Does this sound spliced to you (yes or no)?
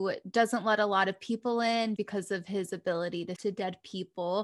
yes